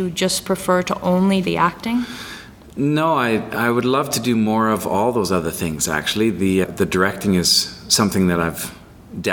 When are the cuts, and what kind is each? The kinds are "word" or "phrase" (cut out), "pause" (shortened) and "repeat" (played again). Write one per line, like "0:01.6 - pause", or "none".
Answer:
0:01.4 - word
0:06.6 - word

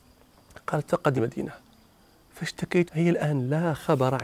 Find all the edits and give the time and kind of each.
0:01.2 - word
0:02.9 - word

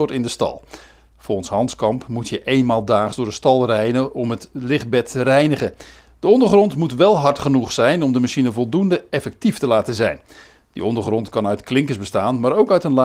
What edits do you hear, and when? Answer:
none

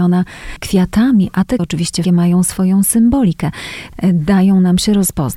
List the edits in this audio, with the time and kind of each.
0:01.6 - word
0:02.0 - word

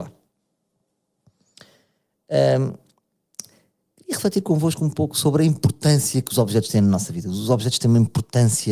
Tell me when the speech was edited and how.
none

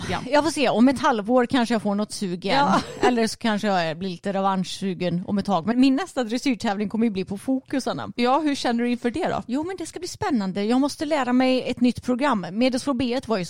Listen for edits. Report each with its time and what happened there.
0:05.7 - word

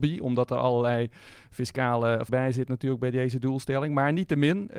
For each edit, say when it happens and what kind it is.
0:02.3 - word

